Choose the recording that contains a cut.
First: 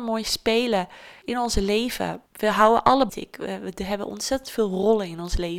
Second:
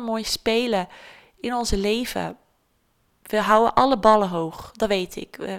first; 3 cuts; at 1.2 s, 2.3 s, 3.1 s

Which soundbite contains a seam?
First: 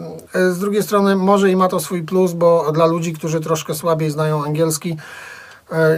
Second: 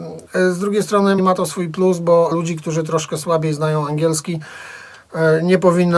second; 2 cuts; at 1.2 s, 2.3 s

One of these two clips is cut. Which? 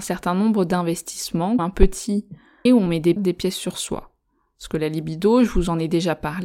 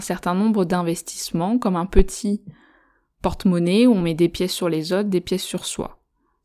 first; 3 cuts; at 1.6 s, 2.7 s, 3.2 s

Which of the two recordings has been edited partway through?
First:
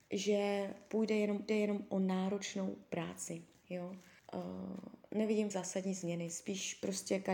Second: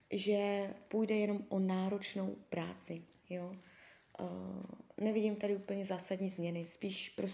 first; 3 cuts; at 1.5 s, 4.2 s, 5.5 s

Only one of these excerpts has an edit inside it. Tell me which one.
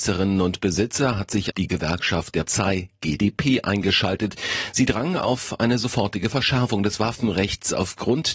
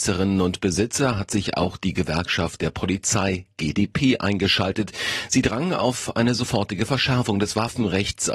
first; 2 cuts; at 1.5 s, 2.5 s

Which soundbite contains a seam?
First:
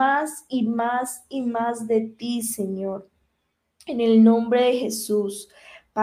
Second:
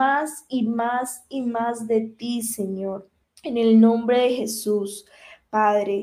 second; 1 cut; at 3.2 s

